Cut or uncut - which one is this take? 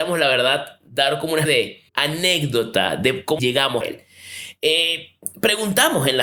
cut